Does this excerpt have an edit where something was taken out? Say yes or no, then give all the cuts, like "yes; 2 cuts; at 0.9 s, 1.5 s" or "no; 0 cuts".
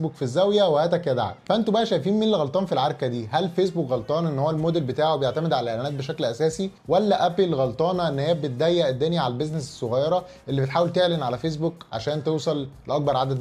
yes; 1 cut; at 6.8 s